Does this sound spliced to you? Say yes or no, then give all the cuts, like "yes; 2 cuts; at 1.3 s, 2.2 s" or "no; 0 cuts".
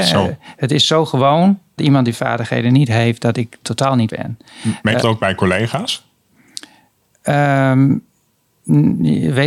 yes; 4 cuts; at 1.8 s, 3.6 s, 4.1 s, 5.0 s